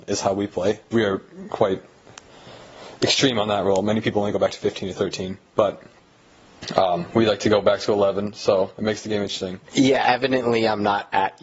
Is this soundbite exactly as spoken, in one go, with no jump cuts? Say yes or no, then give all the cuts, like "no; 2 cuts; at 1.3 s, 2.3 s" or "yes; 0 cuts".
no; 2 cuts; at 0.9 s, 9.6 s